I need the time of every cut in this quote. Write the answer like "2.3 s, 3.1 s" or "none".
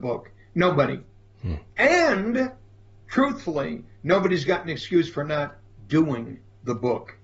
1.7 s